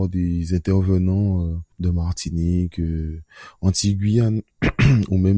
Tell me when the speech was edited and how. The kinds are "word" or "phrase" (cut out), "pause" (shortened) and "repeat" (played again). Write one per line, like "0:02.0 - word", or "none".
0:01.7 - pause